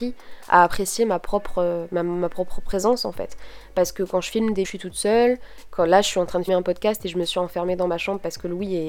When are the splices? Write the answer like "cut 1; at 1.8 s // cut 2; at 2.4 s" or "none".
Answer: cut 1; at 4.6 s // cut 2; at 6.5 s

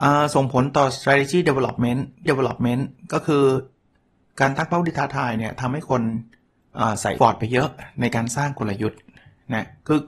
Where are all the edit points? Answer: cut 1; at 2.3 s // cut 2; at 7.2 s

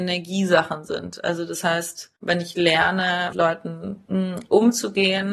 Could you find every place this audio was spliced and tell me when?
cut 1; at 2.2 s // cut 2; at 3.3 s // cut 3; at 4.0 s

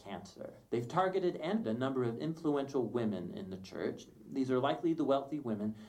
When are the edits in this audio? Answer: cut 1; at 1.6 s

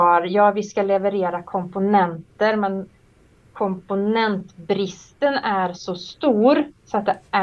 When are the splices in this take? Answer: none

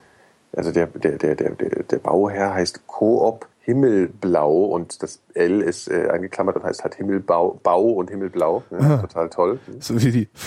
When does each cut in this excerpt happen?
cut 1; at 3.5 s

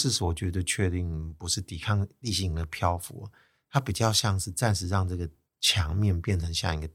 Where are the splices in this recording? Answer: none

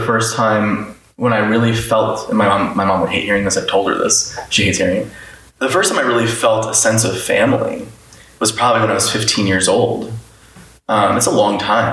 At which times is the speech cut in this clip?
none

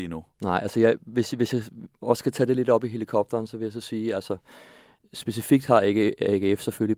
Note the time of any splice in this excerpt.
none

